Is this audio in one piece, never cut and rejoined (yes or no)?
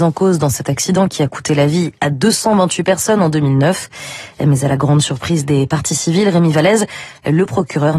yes